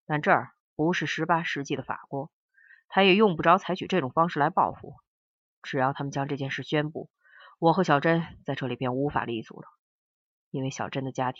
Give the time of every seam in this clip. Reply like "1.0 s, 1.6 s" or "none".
none